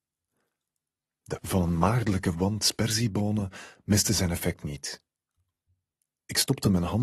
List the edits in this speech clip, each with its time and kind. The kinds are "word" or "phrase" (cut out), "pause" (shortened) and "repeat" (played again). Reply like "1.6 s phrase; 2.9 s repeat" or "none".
1.4 s word